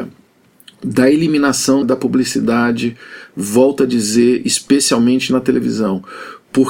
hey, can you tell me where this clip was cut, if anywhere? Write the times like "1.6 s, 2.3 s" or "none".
1.8 s